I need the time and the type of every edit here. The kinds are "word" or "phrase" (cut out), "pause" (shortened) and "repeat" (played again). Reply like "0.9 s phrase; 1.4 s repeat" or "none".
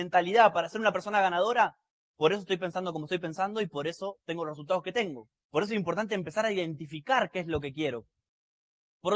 1.9 s pause; 5.4 s pause